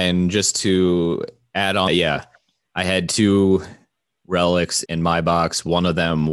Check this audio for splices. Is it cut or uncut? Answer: cut